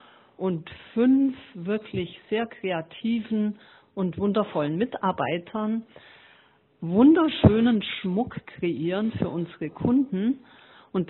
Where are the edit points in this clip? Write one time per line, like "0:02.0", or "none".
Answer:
none